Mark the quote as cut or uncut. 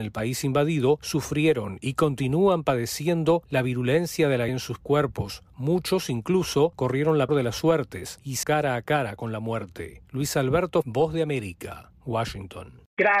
cut